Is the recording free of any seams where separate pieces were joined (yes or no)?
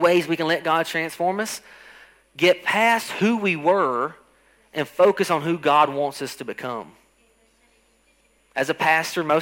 yes